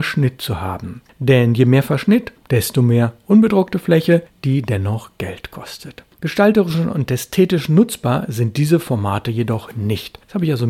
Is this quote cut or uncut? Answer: uncut